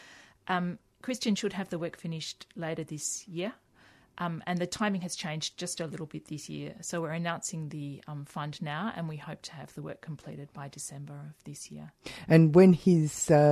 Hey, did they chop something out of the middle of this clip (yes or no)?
no